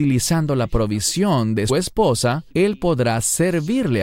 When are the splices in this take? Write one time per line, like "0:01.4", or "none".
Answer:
0:01.7
0:02.5